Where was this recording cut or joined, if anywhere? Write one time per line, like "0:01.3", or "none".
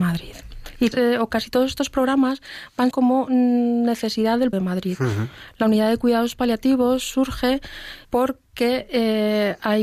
0:00.9
0:02.9
0:04.5
0:08.0